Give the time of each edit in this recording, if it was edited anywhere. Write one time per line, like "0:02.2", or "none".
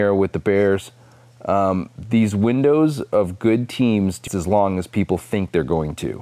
0:04.3